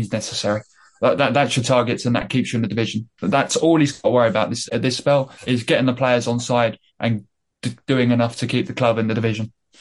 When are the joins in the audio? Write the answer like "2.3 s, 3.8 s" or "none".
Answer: 4.7 s, 5.3 s, 6.9 s